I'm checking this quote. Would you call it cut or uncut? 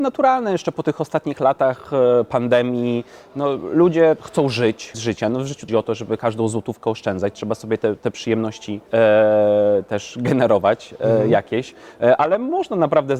cut